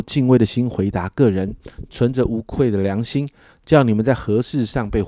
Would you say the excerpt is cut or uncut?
uncut